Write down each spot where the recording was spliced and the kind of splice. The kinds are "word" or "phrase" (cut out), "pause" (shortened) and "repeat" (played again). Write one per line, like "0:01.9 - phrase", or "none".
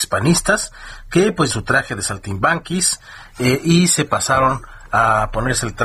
0:01.5 - phrase